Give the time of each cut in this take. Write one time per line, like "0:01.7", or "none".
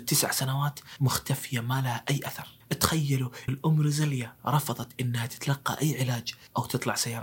0:03.5